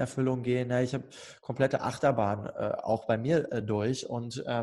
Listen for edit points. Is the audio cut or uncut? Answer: uncut